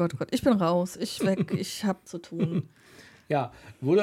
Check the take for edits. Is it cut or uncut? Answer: cut